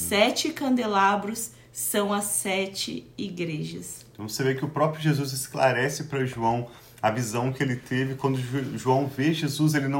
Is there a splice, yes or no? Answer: no